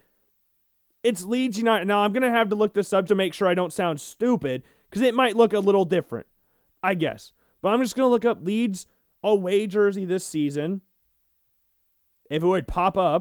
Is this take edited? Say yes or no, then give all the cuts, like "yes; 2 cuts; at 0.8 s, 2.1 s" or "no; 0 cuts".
yes; 1 cut; at 3.1 s